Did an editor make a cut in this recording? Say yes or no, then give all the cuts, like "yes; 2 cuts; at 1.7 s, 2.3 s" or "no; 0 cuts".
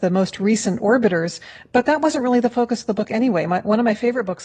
no; 0 cuts